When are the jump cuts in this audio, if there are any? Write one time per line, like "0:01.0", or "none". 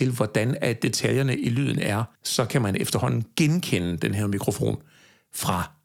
0:02.2